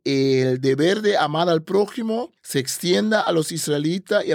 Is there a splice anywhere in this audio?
no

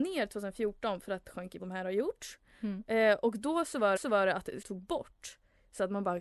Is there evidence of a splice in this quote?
yes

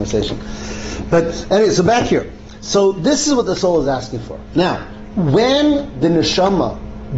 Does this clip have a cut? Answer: no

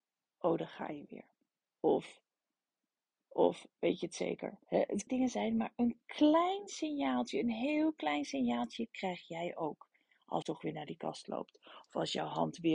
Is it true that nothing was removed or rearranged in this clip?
no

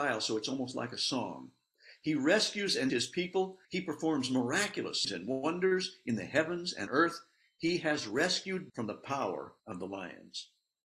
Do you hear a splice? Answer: yes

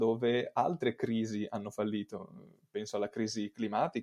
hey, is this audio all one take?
yes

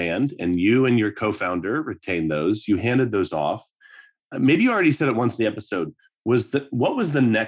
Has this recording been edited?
no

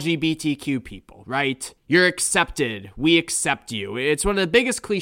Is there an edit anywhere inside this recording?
yes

